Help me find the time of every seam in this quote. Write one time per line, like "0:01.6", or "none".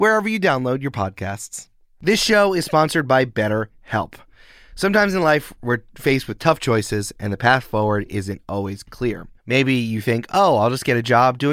none